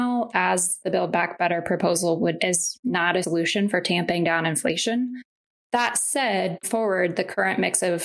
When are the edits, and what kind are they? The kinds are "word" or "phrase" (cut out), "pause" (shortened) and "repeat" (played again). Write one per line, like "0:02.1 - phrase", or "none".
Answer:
0:02.4 - word
0:03.2 - word
0:06.6 - word

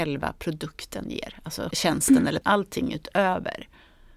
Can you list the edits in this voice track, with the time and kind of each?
0:01.7 - word
0:02.4 - word

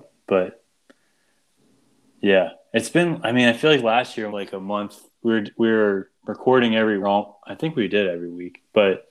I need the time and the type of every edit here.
0:04.3 - phrase
0:06.2 - pause
0:07.0 - phrase

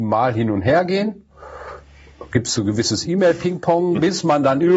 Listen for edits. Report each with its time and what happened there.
none

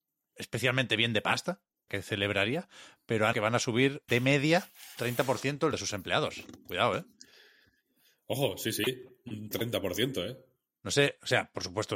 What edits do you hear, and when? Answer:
0:01.9 - word
0:03.3 - word
0:04.1 - word
0:05.0 - word
0:05.7 - word
0:09.5 - word

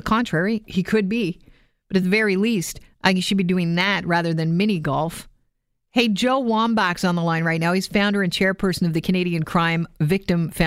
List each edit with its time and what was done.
none

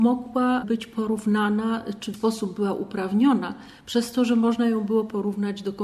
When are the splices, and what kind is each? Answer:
0:02.1 - word

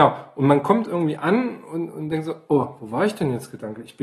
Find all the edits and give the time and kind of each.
none

